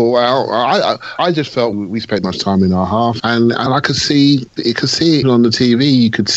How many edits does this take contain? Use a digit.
7